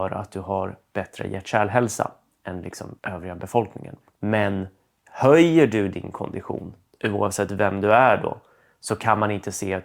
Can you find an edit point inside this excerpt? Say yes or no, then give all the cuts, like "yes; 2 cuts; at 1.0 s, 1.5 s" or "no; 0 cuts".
yes; 1 cut; at 3.0 s